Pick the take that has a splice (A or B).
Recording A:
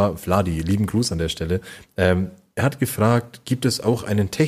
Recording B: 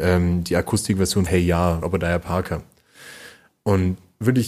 B